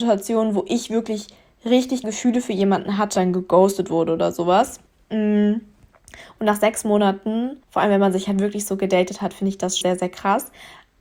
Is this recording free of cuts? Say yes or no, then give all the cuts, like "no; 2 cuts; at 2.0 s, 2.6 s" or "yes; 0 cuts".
no; 5 cuts; at 2.0 s, 3.1 s, 4.9 s, 7.6 s, 9.8 s